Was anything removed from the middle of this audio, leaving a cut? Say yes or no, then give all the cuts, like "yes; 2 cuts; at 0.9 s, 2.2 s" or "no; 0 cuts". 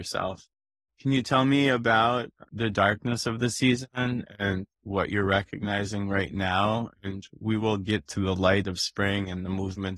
yes; 2 cuts; at 2.5 s, 4.7 s